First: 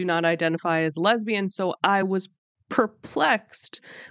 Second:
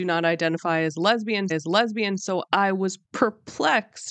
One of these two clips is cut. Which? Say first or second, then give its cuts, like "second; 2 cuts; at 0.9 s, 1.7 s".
second; 2 cuts; at 1.5 s, 3.0 s